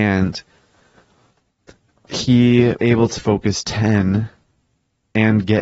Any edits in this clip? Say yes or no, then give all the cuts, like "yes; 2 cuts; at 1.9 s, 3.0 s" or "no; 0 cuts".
yes; 2 cuts; at 2.8 s, 3.2 s